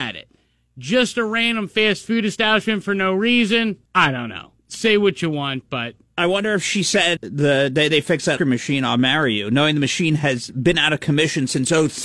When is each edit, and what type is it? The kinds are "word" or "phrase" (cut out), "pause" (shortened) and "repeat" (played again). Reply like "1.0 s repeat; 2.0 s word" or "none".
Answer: 3.9 s pause; 4.6 s pause; 7.2 s word; 8.4 s word